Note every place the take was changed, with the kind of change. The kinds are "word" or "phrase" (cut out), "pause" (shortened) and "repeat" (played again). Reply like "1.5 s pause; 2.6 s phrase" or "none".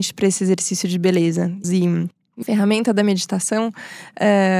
1.6 s phrase; 2.4 s word